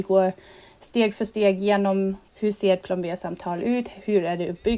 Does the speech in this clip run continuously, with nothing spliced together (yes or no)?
no